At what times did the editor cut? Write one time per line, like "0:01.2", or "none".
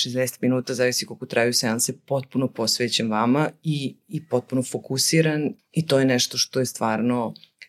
0:05.6